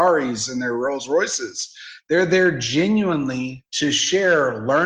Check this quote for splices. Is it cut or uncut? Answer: cut